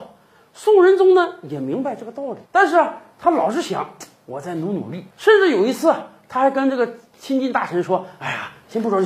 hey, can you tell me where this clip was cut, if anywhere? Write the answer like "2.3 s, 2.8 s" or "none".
2.5 s, 5.1 s

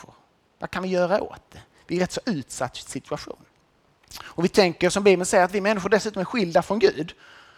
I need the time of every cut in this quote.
none

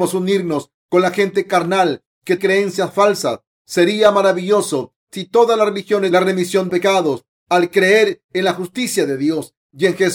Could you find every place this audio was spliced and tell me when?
2.4 s, 6.1 s, 6.7 s

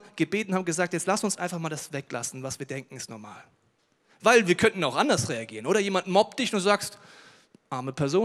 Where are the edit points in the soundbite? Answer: none

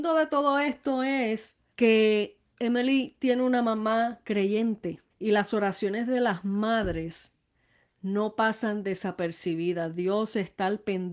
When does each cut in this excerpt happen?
1.7 s, 5.1 s

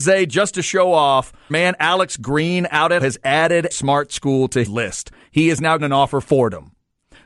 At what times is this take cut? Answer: 1.5 s, 3.0 s, 3.7 s, 4.6 s, 5.8 s, 6.2 s

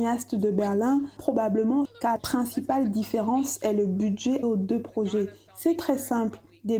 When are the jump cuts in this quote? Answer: 1.2 s, 1.9 s, 2.2 s, 4.4 s

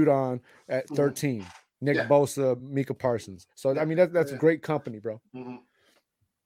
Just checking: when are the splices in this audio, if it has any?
none

